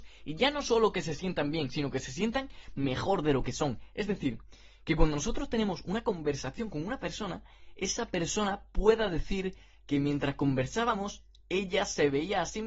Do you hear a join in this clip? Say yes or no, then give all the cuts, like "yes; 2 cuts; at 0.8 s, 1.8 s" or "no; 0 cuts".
no; 0 cuts